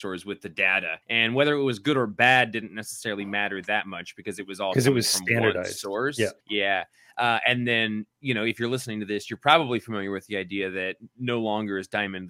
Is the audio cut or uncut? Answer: cut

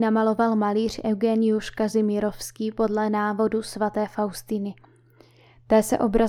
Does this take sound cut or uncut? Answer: uncut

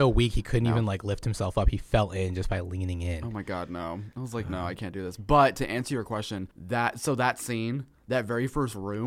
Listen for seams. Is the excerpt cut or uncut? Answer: cut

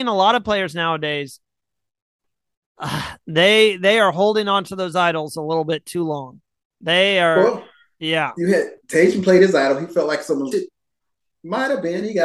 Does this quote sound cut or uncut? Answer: cut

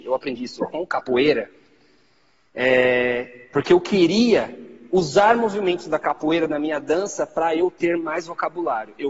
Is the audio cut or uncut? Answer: uncut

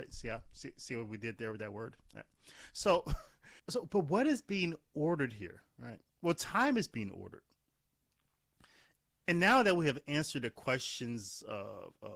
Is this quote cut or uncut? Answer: cut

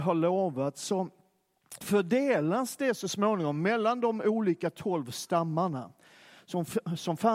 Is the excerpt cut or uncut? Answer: uncut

